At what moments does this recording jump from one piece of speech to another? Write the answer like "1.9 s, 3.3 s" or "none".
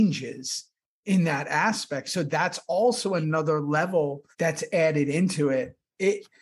4.3 s